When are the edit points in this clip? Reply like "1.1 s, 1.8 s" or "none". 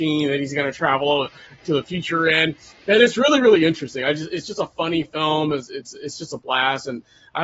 none